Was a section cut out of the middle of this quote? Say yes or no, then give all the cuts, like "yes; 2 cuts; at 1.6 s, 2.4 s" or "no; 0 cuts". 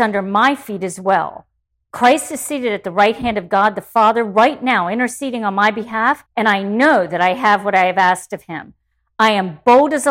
yes; 1 cut; at 6.3 s